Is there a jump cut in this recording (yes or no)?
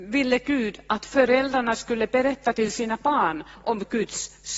no